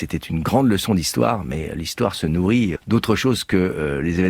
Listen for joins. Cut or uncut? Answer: cut